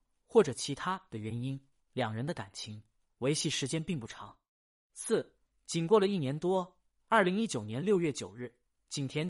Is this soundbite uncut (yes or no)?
yes